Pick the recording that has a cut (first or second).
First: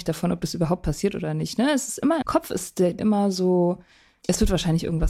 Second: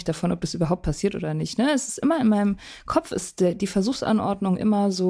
first